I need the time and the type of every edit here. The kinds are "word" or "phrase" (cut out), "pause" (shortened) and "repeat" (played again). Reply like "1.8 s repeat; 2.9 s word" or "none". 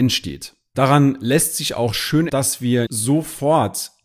2.3 s word; 2.9 s word